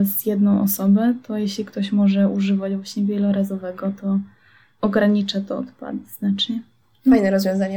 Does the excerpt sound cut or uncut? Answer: uncut